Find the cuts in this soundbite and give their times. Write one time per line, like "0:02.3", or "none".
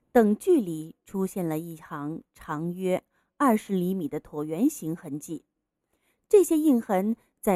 none